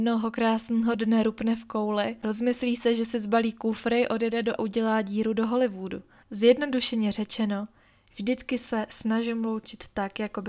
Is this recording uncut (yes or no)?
no